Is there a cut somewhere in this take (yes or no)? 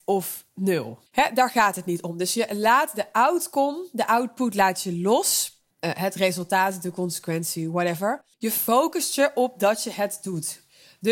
yes